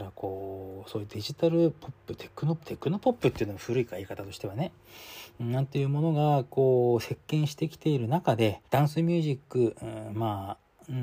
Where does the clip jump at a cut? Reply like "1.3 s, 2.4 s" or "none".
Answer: 8.6 s